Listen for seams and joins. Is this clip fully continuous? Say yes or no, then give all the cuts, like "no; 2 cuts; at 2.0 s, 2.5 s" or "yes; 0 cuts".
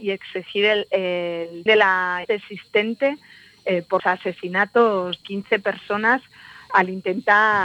no; 5 cuts; at 1.7 s, 2.2 s, 4.0 s, 5.2 s, 6.7 s